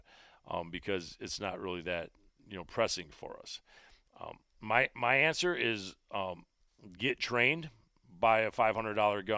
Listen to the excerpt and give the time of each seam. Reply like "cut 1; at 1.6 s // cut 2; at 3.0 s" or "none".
none